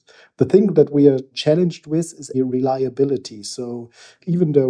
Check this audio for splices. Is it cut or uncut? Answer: cut